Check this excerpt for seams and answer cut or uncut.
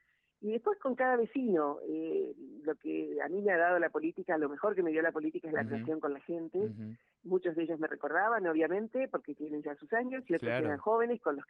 uncut